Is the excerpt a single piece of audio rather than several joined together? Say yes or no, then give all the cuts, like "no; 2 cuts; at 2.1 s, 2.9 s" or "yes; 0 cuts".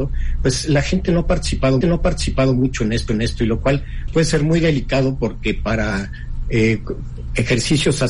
no; 3 cuts; at 1.8 s, 3.1 s, 4.1 s